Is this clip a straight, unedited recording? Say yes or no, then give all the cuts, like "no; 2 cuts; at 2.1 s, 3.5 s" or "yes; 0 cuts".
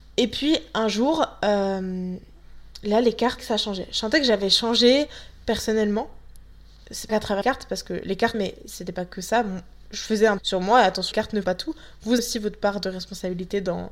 no; 8 cuts; at 3.4 s, 7.1 s, 7.4 s, 8.3 s, 10.4 s, 11.1 s, 11.4 s, 12.2 s